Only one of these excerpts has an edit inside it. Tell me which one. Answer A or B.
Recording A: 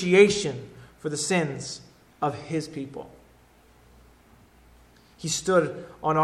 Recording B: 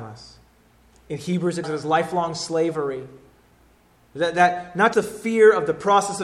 B